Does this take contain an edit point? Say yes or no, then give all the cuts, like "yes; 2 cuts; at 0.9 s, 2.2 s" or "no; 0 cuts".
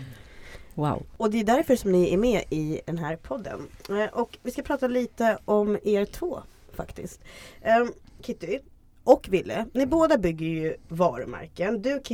no; 0 cuts